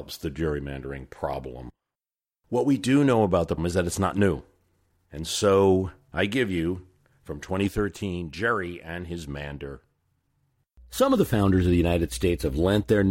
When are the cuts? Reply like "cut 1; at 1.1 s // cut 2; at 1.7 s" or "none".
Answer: cut 1; at 1.9 s // cut 2; at 3.6 s // cut 3; at 4.9 s

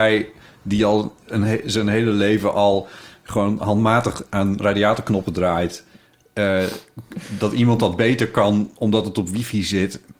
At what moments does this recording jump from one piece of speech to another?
none

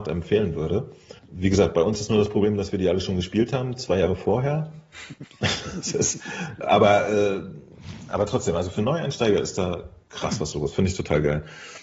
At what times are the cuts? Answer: cut 1; at 1.2 s

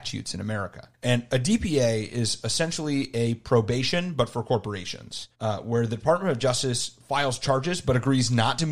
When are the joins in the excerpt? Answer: cut 1; at 0.9 s // cut 2; at 5.3 s

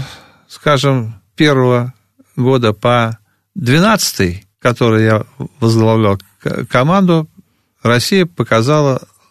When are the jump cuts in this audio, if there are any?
cut 1; at 1.3 s // cut 2; at 4.5 s

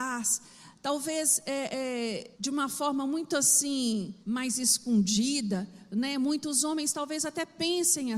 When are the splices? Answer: cut 1; at 2.3 s // cut 2; at 4.2 s

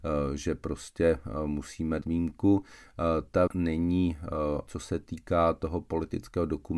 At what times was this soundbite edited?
cut 1; at 2.0 s // cut 2; at 3.5 s // cut 3; at 4.7 s

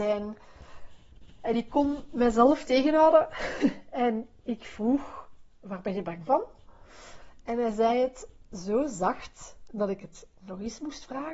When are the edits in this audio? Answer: none

